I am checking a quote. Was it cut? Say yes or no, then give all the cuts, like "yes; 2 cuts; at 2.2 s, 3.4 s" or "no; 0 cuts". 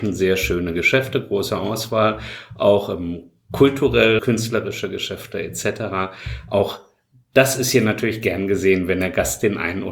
yes; 1 cut; at 4.2 s